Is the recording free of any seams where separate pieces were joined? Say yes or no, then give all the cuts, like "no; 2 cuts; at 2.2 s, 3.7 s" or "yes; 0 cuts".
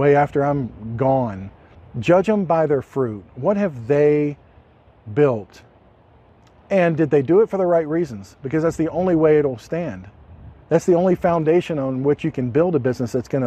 no; 1 cut; at 1.7 s